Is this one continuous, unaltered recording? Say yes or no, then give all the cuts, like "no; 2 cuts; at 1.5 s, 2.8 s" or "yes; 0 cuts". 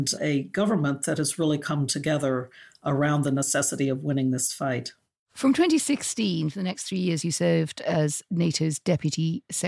yes; 0 cuts